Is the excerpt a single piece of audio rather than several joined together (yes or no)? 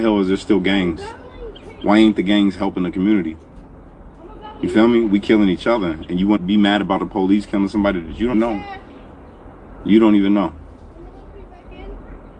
no